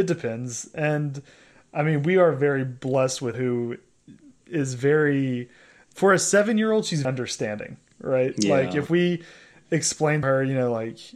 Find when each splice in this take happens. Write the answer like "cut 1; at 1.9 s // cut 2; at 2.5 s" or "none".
cut 1; at 3.3 s // cut 2; at 7.0 s // cut 3; at 10.2 s